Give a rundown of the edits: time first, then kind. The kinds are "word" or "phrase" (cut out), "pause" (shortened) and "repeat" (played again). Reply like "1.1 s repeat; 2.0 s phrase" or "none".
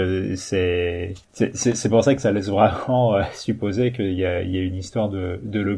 1.2 s pause